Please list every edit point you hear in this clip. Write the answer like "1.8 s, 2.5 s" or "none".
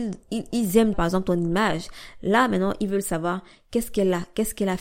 0.9 s

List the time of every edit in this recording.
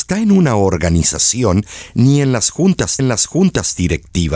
3.0 s

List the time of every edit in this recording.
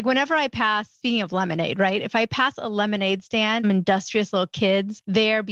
3.6 s

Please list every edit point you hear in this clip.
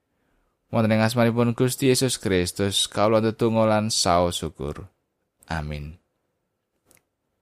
none

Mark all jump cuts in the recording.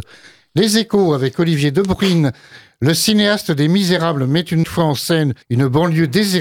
4.6 s, 5.4 s

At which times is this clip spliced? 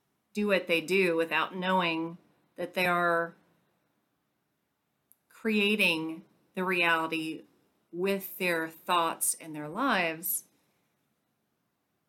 none

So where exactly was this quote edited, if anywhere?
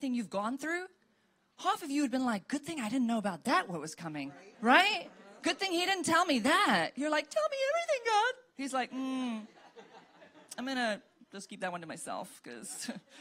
4.5 s

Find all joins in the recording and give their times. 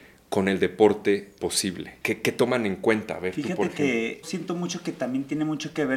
1.4 s, 4.2 s

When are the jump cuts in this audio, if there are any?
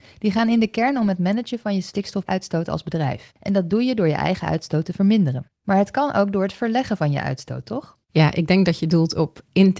3.4 s

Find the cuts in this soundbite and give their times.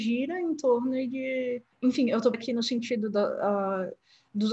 2.3 s

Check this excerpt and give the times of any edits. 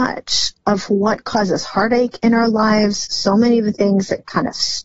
none

